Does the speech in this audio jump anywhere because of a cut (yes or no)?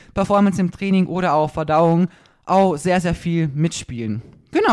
no